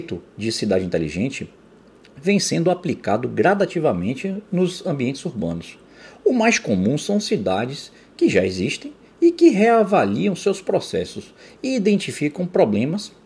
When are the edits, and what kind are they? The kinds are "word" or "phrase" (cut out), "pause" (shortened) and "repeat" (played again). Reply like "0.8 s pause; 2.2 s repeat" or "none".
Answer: none